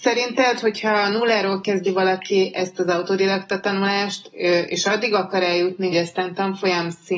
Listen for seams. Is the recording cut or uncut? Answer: cut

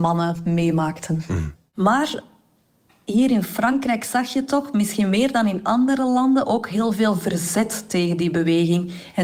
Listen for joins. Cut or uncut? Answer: uncut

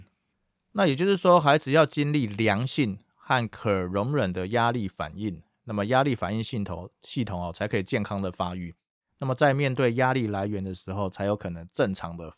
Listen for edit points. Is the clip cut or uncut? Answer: uncut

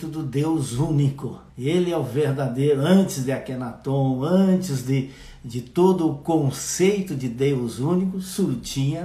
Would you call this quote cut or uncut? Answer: cut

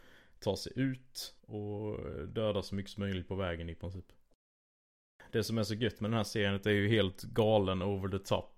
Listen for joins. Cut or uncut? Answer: cut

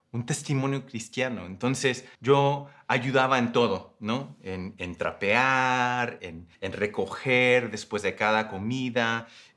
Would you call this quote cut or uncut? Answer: cut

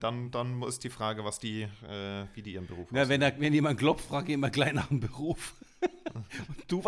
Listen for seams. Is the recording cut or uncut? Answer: uncut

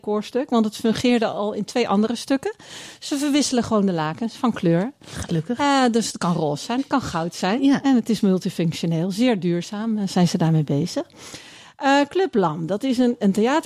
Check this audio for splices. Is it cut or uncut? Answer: uncut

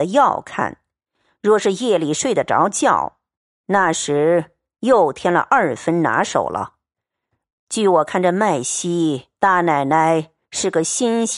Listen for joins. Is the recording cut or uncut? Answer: cut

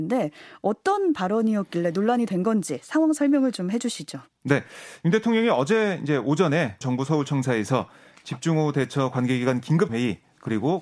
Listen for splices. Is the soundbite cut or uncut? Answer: cut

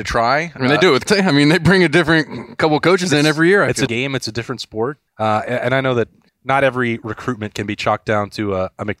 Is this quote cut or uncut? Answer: cut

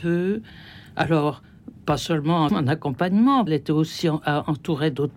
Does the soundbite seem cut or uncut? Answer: cut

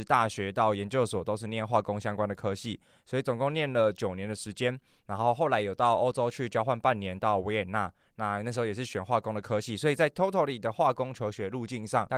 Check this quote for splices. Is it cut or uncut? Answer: uncut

